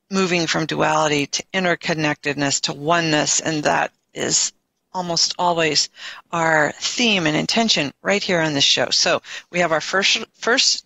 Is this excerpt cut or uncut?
uncut